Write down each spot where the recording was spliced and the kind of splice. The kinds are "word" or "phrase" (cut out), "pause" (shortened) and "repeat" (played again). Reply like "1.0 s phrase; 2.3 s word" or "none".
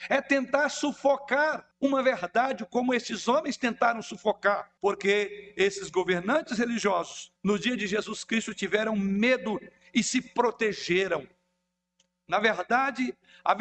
1.7 s pause; 4.8 s pause; 7.4 s pause

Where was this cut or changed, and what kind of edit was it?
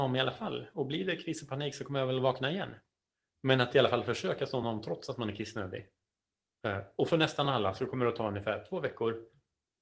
none

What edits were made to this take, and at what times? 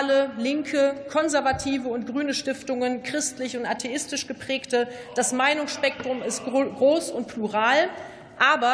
none

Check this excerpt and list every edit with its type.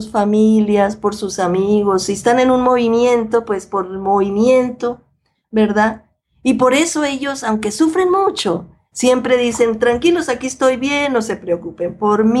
none

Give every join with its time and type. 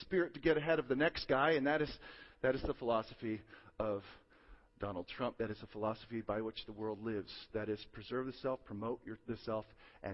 none

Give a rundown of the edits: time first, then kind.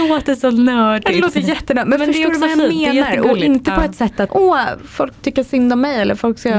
4.3 s word; 5.1 s word

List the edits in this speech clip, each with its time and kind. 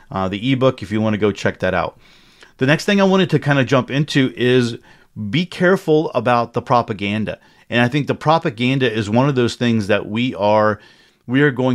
none

